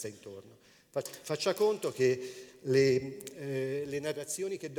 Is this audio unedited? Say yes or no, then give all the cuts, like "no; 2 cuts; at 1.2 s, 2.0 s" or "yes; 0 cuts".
yes; 0 cuts